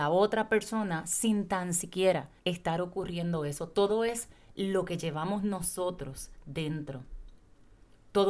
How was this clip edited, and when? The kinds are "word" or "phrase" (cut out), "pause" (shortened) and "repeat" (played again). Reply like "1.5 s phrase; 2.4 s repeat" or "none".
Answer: 2.4 s pause